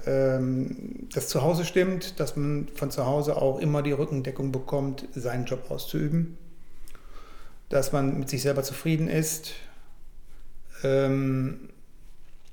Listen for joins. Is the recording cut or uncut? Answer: uncut